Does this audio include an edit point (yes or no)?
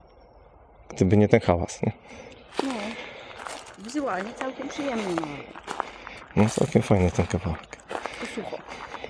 no